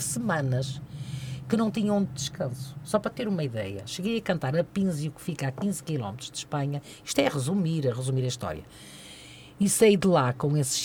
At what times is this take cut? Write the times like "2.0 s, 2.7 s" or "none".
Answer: 2.1 s